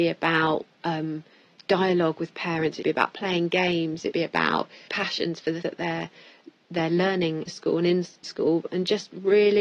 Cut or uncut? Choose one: cut